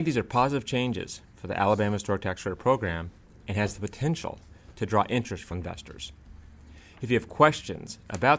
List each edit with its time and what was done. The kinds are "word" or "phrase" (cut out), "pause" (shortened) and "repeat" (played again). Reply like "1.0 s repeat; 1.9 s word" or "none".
5.5 s word